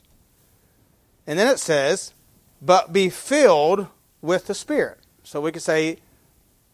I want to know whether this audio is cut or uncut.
uncut